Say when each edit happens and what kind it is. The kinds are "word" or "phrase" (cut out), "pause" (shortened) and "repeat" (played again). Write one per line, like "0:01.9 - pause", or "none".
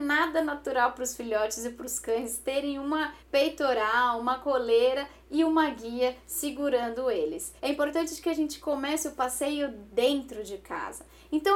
0:03.2 - pause
0:07.6 - pause

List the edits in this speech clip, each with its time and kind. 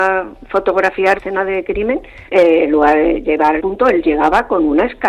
0:01.2 - word
0:02.3 - pause
0:03.6 - phrase

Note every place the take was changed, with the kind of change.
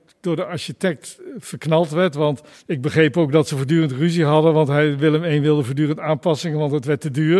0:02.5 - pause

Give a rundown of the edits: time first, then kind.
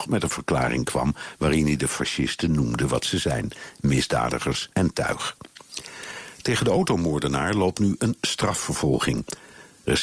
0:04.7 - pause

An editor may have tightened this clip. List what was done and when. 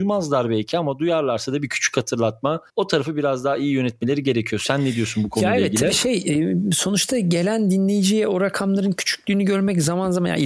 0:02.7 - pause

